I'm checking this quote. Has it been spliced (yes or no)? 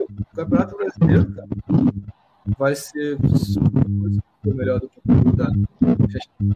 no